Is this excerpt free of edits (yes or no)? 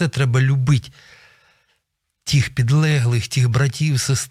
yes